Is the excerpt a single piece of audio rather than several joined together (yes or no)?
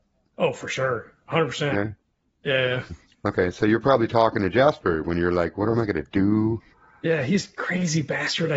yes